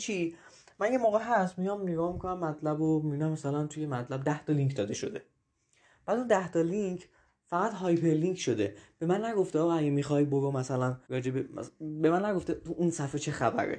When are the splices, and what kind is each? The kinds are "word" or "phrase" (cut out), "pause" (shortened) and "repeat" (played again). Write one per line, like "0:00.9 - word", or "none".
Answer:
0:11.0 - pause